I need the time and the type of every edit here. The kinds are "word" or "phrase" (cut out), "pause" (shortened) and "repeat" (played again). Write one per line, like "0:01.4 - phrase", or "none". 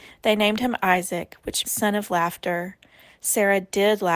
0:01.6 - word

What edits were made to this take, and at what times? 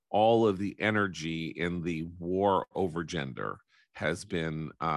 none

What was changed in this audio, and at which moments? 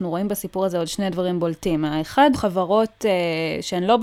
0:02.3 - word

